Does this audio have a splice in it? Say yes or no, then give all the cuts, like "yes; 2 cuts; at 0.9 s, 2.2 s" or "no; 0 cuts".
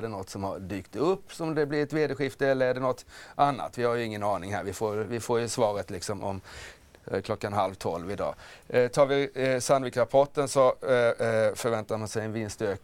no; 0 cuts